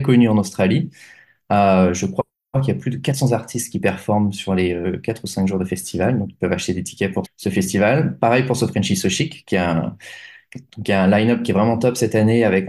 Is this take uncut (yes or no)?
no